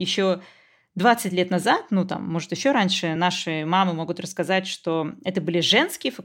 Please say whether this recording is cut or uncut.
uncut